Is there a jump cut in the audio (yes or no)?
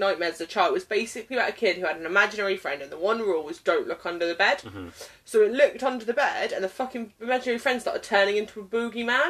no